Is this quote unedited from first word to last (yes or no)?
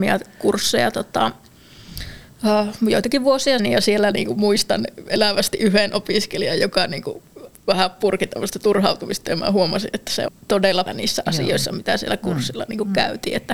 no